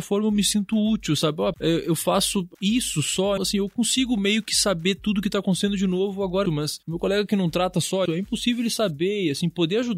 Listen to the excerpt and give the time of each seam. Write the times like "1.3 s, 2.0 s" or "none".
1.5 s, 3.4 s, 6.5 s, 8.1 s

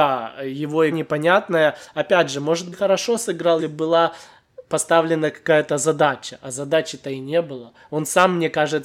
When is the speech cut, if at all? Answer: 0.9 s, 2.7 s, 3.6 s

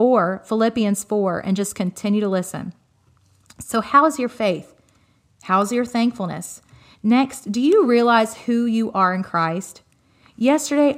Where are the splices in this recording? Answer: none

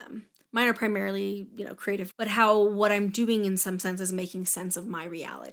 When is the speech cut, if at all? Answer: 2.1 s

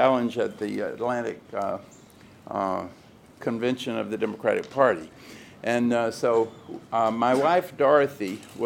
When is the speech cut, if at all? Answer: none

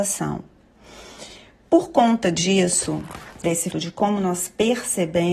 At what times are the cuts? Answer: 3.7 s

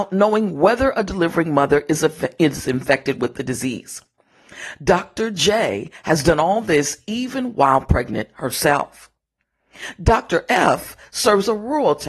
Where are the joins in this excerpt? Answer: none

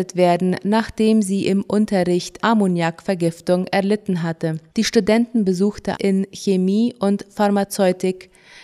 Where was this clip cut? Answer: 2.4 s, 4.7 s, 5.9 s

